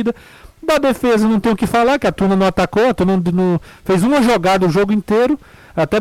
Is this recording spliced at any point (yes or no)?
no